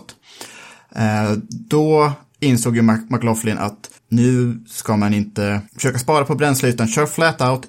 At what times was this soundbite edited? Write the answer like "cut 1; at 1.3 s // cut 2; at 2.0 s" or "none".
cut 1; at 4.0 s // cut 2; at 5.7 s